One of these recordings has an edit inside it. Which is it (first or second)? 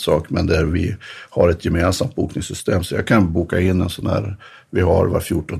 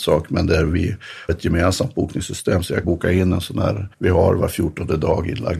second